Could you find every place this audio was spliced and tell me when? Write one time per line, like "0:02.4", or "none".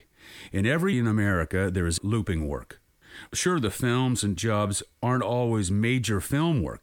0:00.9
0:02.0
0:04.4